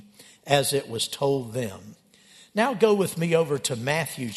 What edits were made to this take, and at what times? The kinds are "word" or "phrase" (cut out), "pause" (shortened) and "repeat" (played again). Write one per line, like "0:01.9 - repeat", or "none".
none